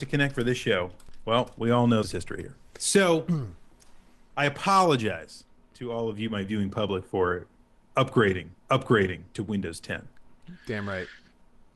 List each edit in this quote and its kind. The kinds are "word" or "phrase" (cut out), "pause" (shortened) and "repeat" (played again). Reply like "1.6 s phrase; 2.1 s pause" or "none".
2.0 s phrase; 8.5 s repeat